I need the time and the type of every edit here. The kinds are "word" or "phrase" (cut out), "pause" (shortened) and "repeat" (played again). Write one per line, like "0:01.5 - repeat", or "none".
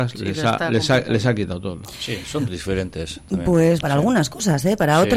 0:02.5 - word
0:03.8 - word